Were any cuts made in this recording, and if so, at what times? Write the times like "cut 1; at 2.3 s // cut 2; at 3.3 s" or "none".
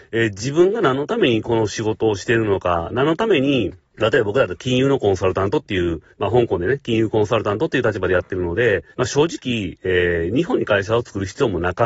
cut 1; at 3.8 s // cut 2; at 6.1 s // cut 3; at 8.9 s